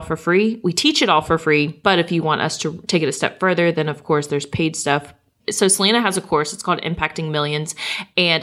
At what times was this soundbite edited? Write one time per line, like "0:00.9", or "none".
none

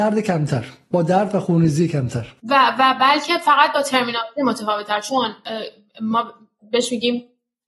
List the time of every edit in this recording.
0:02.4

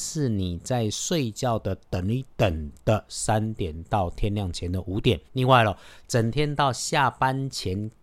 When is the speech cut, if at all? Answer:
0:05.3

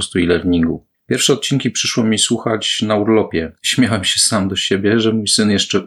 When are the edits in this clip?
0:00.9
0:03.6

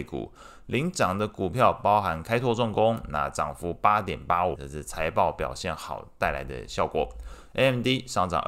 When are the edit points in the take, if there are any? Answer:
0:04.6

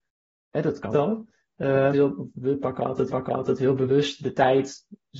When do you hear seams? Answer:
0:00.9
0:01.9
0:03.1

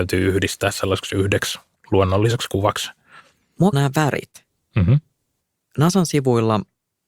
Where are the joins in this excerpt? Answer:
0:03.7

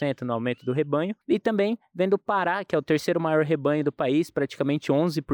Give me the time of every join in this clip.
0:01.2

